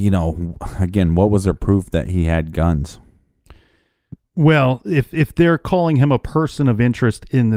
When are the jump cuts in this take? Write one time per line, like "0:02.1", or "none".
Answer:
none